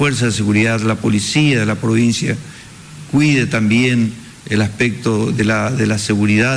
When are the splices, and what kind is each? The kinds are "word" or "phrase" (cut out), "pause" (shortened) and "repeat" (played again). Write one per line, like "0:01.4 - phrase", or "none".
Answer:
none